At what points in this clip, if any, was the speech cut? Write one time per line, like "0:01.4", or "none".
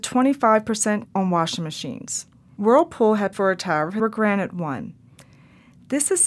0:01.0
0:03.3
0:04.0